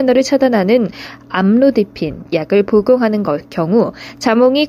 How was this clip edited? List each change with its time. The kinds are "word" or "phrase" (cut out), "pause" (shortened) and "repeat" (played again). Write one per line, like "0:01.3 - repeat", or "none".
0:02.3 - phrase